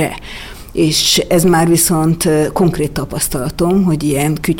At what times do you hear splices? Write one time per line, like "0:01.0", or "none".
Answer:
none